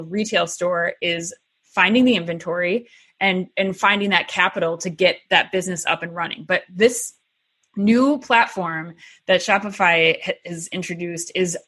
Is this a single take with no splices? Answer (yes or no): yes